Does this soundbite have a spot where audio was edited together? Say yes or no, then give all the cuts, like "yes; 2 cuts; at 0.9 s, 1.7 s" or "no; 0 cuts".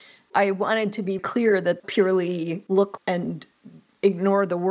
yes; 3 cuts; at 1.2 s, 1.8 s, 3.0 s